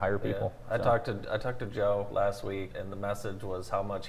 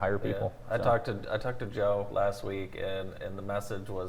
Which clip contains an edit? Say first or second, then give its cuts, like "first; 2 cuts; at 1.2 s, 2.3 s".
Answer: first; 1 cut; at 2.7 s